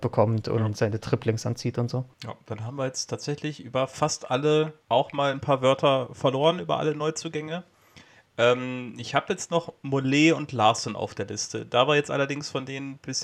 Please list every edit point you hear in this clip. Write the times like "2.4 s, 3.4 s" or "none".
2.1 s, 4.8 s